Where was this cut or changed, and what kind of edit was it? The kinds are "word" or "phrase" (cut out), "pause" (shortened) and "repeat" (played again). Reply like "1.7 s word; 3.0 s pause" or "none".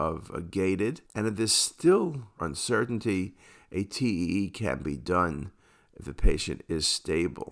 1.1 s pause; 2.4 s phrase